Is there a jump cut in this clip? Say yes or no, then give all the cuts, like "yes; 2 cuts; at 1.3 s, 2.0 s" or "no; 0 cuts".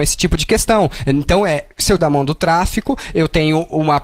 yes; 1 cut; at 2.0 s